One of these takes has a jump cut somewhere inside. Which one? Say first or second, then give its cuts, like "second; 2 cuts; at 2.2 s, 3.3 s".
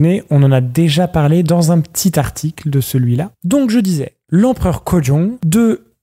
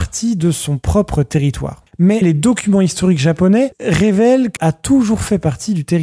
second; 2 cuts; at 2.2 s, 4.6 s